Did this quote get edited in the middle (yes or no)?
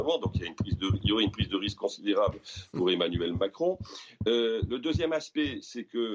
no